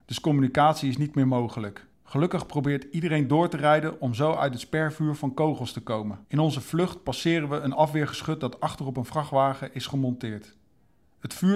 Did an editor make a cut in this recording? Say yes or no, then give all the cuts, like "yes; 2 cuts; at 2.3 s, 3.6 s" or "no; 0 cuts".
yes; 2 cuts; at 1.9 s, 6.2 s